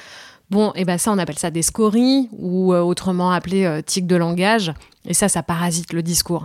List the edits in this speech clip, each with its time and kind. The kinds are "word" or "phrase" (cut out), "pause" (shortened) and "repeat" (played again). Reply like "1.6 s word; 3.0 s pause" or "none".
none